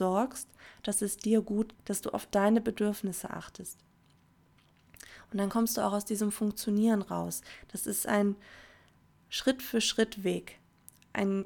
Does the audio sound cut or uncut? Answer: cut